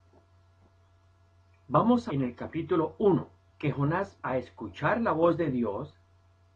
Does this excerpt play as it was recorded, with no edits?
no; 3 cuts; at 2.1 s, 3.5 s, 4.2 s

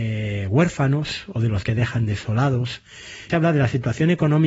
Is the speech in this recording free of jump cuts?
no; 2 cuts; at 1.6 s, 3.3 s

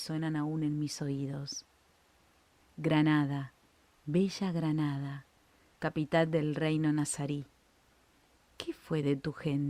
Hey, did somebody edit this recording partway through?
no; 0 cuts

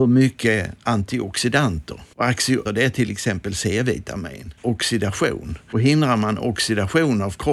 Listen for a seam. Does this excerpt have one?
yes; 2 cuts; at 2.7 s, 4.6 s

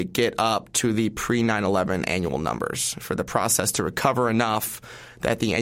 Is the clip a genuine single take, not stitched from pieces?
yes; 0 cuts

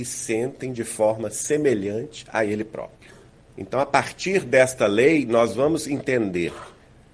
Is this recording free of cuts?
no; 1 cut; at 3.4 s

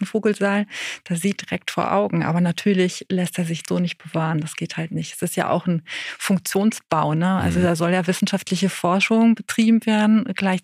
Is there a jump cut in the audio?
yes; 1 cut; at 1.4 s

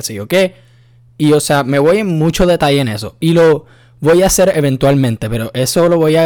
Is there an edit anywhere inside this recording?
no; 0 cuts

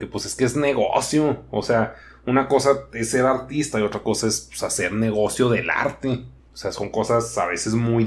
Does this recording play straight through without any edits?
yes; 0 cuts

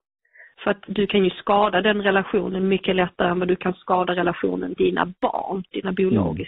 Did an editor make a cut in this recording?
yes; 1 cut; at 4.8 s

